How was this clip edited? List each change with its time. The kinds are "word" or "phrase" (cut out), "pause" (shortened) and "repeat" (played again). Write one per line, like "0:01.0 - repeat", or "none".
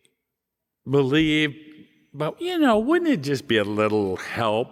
none